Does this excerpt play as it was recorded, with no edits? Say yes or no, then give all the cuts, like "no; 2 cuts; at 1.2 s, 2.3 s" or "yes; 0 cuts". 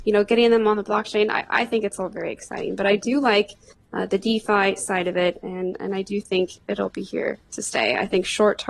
yes; 0 cuts